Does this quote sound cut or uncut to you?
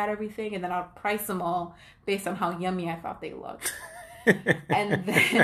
uncut